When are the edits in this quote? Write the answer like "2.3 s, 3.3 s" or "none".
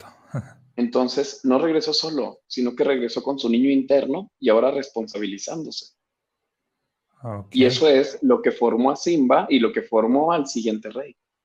none